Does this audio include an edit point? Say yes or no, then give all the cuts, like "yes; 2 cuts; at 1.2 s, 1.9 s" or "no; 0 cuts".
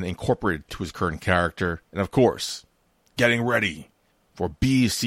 yes; 1 cut; at 1.8 s